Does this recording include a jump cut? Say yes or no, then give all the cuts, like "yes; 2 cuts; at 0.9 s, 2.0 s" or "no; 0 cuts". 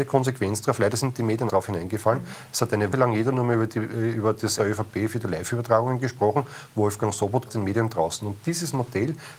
yes; 4 cuts; at 1.5 s, 2.9 s, 4.6 s, 7.5 s